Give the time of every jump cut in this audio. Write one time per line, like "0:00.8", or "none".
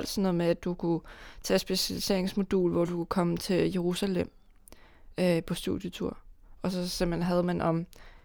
none

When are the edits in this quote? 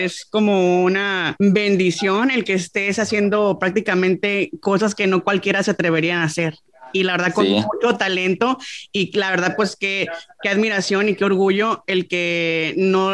none

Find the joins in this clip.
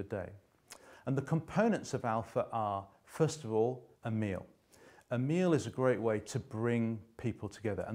0:03.9

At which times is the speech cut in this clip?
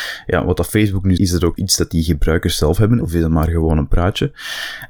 0:01.2
0:01.6
0:03.0

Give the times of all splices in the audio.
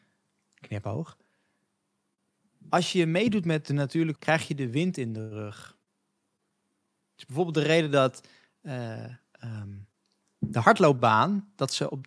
0:04.2

